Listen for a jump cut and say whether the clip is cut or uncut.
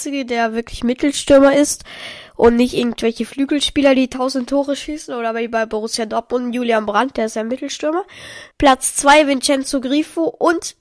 cut